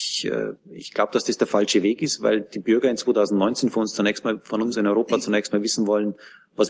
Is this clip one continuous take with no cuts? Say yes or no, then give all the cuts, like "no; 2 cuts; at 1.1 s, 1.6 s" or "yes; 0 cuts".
yes; 0 cuts